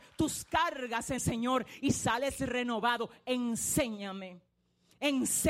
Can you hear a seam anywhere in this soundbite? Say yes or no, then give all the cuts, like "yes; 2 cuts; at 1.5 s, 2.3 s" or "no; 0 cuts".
yes; 1 cut; at 1.2 s